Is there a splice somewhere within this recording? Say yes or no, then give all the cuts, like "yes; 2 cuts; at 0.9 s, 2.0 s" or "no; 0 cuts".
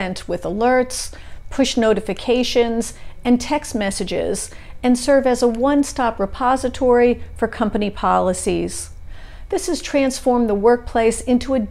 no; 0 cuts